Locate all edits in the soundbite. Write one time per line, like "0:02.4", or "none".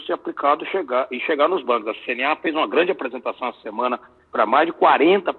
none